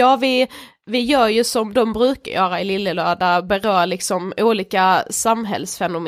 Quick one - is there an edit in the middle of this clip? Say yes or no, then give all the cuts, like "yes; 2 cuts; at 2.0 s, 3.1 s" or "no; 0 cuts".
no; 0 cuts